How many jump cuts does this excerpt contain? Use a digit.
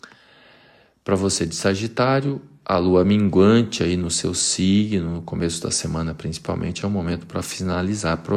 0